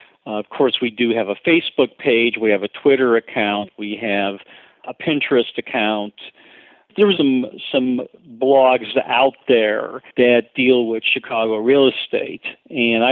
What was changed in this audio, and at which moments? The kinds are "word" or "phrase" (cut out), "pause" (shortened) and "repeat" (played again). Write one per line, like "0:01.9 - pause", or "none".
0:07.2 - word
0:10.1 - pause